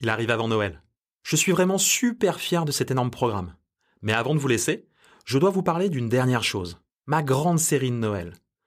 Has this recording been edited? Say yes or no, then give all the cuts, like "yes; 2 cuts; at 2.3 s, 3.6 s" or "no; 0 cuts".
no; 0 cuts